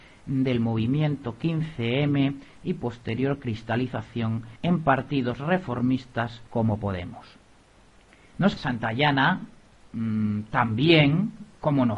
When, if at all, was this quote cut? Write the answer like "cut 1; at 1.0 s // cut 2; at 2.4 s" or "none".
cut 1; at 4.6 s // cut 2; at 6.5 s // cut 3; at 8.6 s